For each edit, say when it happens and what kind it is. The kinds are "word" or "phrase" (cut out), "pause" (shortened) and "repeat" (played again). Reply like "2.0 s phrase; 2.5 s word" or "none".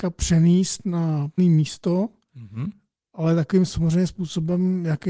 1.4 s word